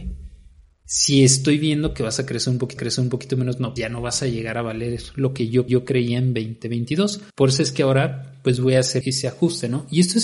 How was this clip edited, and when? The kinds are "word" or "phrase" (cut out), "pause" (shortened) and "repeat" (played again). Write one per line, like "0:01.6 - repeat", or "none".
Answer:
0:02.8 - repeat
0:03.8 - word
0:05.7 - repeat
0:07.3 - pause
0:09.0 - word